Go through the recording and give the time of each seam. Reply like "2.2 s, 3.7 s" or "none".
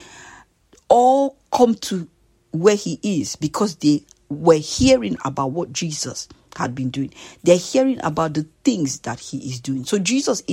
none